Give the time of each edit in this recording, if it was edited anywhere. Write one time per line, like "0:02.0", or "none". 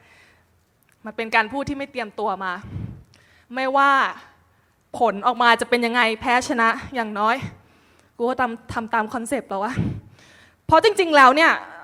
none

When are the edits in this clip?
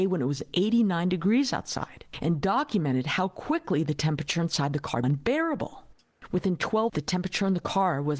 0:05.0
0:06.9

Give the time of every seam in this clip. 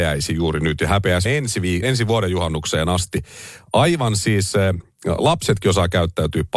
0:01.3
0:01.8

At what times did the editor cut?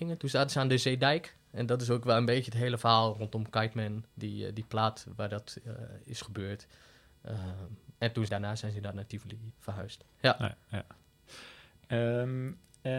0:04.1
0:08.0
0:08.3
0:09.5

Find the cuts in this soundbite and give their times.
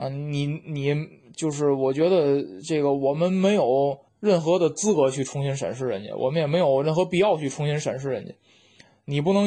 0:04.1

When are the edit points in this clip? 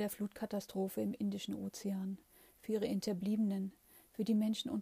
none

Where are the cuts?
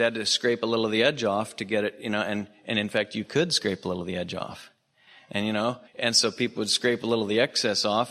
0:05.9

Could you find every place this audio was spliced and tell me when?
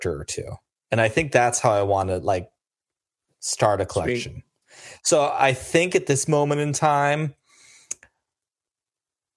none

